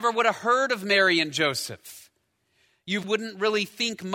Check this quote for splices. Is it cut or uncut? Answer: cut